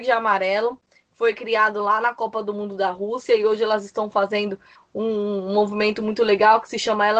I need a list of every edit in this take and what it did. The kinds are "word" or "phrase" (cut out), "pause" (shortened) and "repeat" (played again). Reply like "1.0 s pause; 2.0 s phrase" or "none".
4.8 s word